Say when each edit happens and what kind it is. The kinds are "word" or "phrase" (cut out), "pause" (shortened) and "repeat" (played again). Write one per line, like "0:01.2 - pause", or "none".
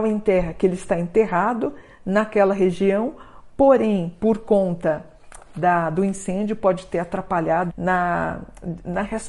0:07.7 - word

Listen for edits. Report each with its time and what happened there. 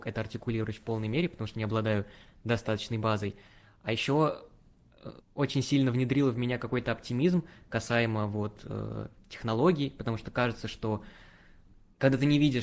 0:05.2 - pause

